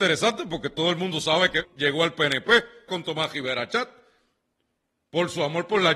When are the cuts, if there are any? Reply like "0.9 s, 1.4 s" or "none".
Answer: 1.6 s, 2.9 s